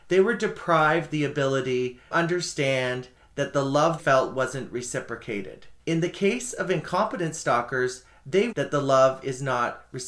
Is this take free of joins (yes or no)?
no